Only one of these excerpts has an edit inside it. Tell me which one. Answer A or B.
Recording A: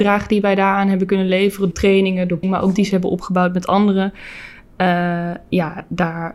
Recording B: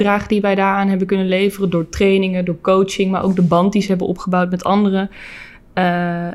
A